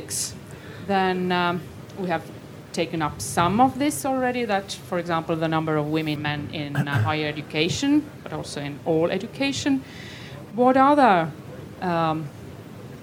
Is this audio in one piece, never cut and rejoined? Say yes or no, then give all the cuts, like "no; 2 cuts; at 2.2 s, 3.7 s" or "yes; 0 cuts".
no; 1 cut; at 6.2 s